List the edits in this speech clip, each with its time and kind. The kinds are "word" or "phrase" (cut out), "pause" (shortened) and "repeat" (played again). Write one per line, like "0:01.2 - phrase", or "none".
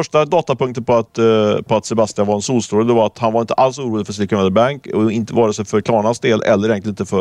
none

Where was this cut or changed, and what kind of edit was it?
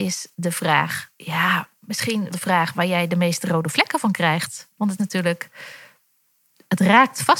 0:01.1 - pause
0:02.3 - word
0:05.0 - word

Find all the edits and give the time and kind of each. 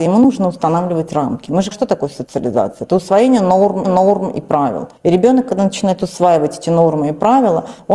0:01.7 - word
0:03.8 - repeat
0:05.0 - pause

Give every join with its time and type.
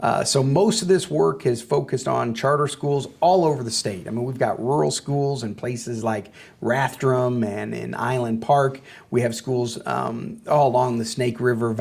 none

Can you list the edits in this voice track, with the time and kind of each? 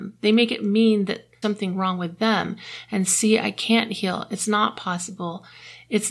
0:01.4 - word

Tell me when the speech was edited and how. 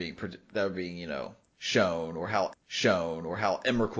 0:02.5 - repeat

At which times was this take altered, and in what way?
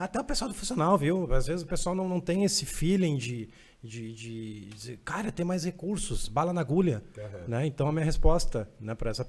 none

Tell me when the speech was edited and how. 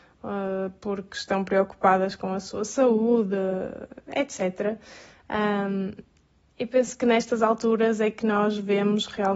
none

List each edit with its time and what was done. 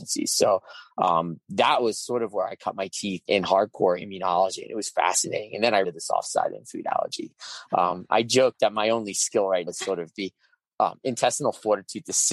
0:03.2 - word
0:05.8 - word
0:09.7 - word
0:10.1 - word

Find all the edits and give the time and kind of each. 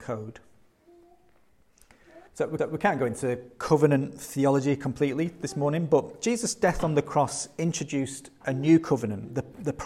0:02.3 - pause
0:02.6 - repeat

